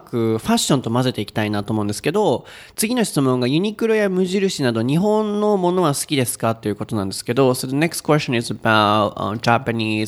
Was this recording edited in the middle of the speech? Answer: no; 0 cuts

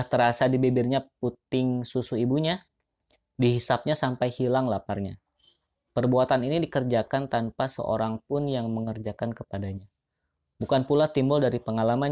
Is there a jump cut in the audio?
no; 0 cuts

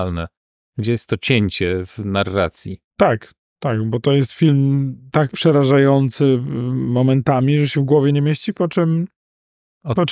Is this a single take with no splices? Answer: no; 1 cut; at 2.8 s

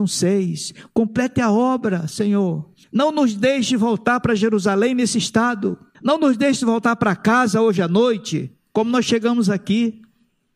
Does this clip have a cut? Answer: yes; 2 cuts; at 2.8 s, 5.9 s

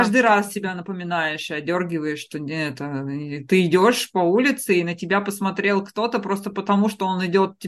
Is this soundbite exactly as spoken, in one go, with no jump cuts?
yes; 0 cuts

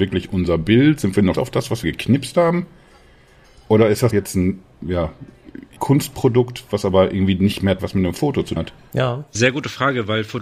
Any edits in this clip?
yes; 7 cuts; at 1.3 s, 1.8 s, 4.1 s, 5.8 s, 7.8 s, 8.6 s, 9.3 s

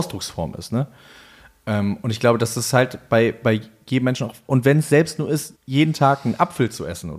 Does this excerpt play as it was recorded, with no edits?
no; 1 cut; at 5.6 s

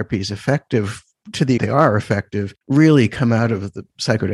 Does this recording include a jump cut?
yes; 2 cuts; at 1.6 s, 2.6 s

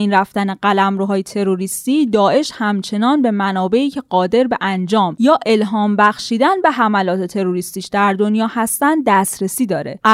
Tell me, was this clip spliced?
no; 0 cuts

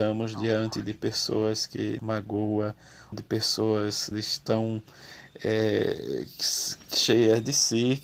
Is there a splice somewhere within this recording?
yes; 3 cuts; at 2.0 s, 3.1 s, 4.1 s

